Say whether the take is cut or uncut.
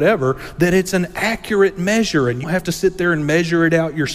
cut